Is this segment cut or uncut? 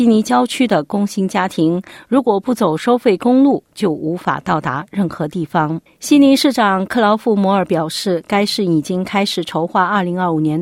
cut